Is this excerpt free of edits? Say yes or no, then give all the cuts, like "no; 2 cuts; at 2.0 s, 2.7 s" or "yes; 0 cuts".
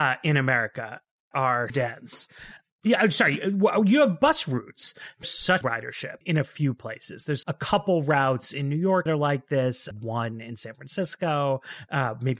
no; 8 cuts; at 1.3 s, 1.7 s, 5.2 s, 5.6 s, 6.2 s, 7.4 s, 9.1 s, 9.9 s